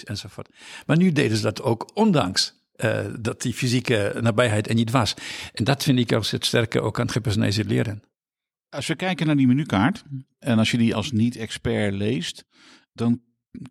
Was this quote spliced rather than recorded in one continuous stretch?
yes; 1 cut; at 10.9 s

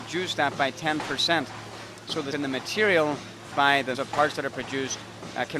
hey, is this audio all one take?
no; 3 cuts; at 2.3 s, 3.5 s, 3.9 s

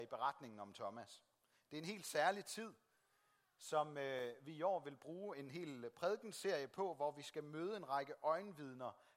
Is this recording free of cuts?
yes; 0 cuts

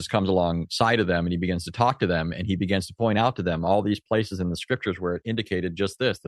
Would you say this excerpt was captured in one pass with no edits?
yes; 0 cuts

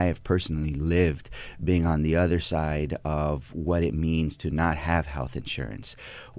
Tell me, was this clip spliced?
no; 0 cuts

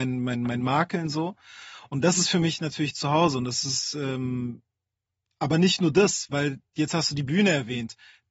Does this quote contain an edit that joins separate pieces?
no; 0 cuts

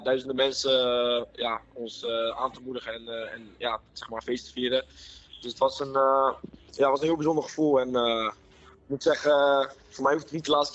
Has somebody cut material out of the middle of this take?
no; 0 cuts

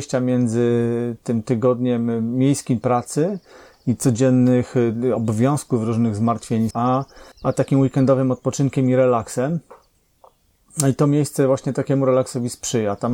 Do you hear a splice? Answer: yes; 3 cuts; at 2.8 s, 6.7 s, 7.3 s

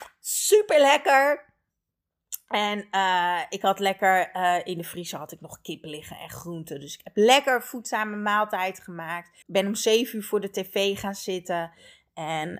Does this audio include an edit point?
yes; 1 cut; at 9.4 s

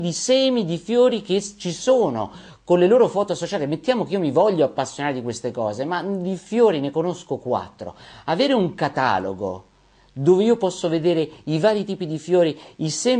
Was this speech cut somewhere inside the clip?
no; 0 cuts

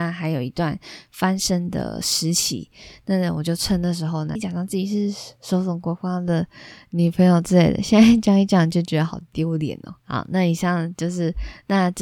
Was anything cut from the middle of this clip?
yes; 2 cuts; at 4.4 s, 10.0 s

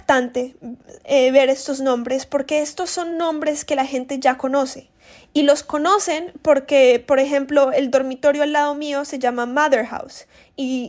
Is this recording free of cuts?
yes; 0 cuts

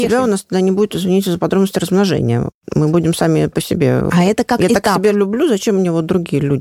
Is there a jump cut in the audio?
no; 0 cuts

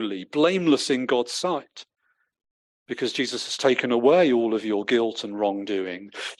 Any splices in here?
no; 0 cuts

